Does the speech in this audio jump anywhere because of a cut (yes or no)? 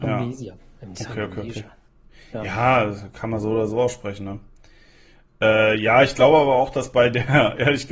no